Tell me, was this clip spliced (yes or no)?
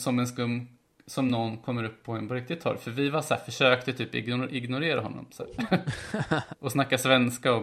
no